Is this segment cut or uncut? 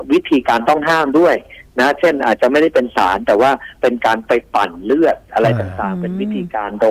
uncut